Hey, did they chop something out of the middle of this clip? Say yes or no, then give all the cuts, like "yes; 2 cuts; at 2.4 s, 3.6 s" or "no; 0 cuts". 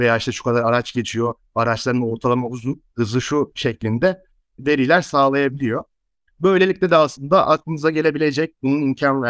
no; 0 cuts